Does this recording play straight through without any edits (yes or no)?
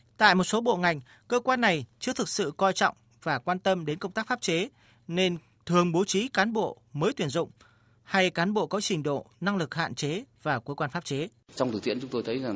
yes